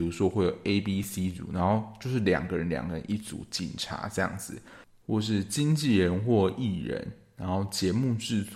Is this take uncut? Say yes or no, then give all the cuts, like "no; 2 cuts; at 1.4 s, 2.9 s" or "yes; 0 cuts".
yes; 0 cuts